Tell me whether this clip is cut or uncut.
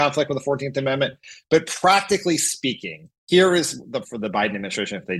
cut